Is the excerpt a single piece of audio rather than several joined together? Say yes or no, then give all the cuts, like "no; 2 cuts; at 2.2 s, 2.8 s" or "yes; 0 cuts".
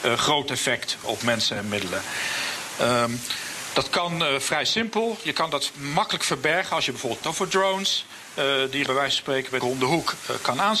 no; 4 cuts; at 1.0 s, 7.2 s, 8.9 s, 9.6 s